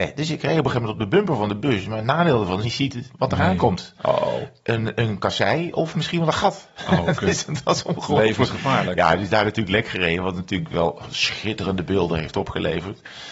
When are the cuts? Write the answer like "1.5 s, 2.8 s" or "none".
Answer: 2.6 s